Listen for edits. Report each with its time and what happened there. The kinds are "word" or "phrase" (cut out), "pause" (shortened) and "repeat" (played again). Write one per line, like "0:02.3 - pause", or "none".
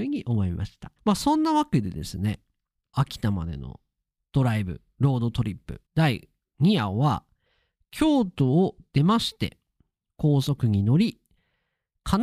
0:01.0 - pause
0:02.9 - phrase
0:05.9 - pause